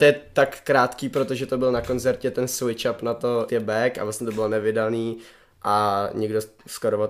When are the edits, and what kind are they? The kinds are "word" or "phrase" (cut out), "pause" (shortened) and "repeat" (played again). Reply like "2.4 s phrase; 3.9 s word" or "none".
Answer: 3.5 s phrase